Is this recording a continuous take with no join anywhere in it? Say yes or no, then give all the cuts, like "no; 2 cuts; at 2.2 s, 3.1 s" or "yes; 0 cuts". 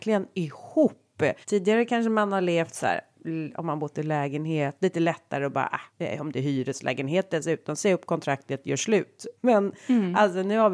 no; 3 cuts; at 1.4 s, 5.9 s, 9.4 s